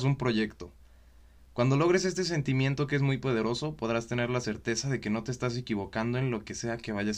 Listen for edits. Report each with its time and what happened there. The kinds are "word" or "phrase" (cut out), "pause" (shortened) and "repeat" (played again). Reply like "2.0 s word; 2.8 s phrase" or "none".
none